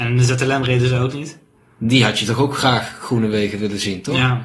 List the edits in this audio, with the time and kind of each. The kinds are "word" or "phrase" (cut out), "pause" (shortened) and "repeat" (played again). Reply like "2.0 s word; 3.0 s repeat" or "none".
none